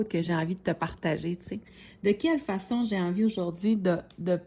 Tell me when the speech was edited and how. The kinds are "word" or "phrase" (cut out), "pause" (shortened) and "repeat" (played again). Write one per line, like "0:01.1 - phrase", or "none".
none